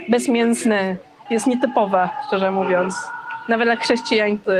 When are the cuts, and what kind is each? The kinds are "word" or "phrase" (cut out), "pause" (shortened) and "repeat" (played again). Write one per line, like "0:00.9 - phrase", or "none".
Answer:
0:01.3 - word

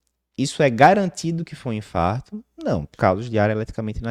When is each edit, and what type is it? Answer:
0:02.9 - word

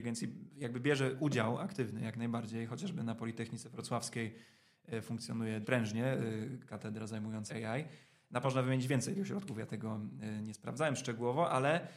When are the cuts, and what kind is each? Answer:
0:05.6 - word
0:07.5 - word
0:08.4 - word
0:09.1 - word

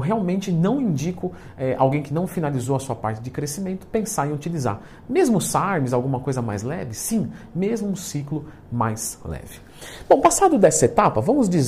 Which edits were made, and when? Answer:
none

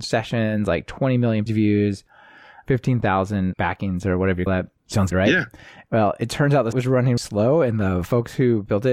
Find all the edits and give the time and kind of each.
0:01.5 - word
0:03.6 - word
0:04.5 - word
0:05.1 - word
0:06.7 - word
0:07.2 - word

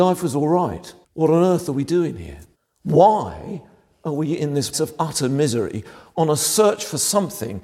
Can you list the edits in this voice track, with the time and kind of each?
0:01.0 - pause
0:02.5 - pause
0:04.7 - word

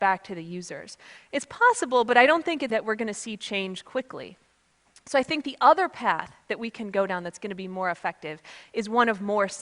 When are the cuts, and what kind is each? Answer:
0:02.7 - word

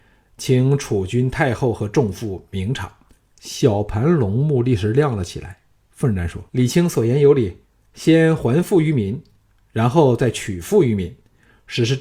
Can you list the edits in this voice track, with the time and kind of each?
0:03.1 - pause
0:06.5 - pause
0:07.6 - pause

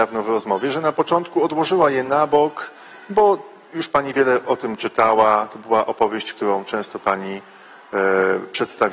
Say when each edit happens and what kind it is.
none

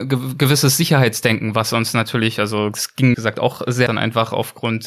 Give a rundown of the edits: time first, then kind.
0:03.1 - phrase
0:03.9 - phrase

